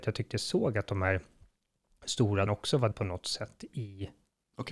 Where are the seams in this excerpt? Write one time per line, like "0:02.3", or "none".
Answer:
0:02.5
0:02.9